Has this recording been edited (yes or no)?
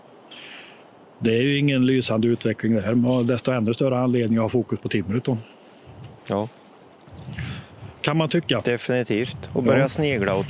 yes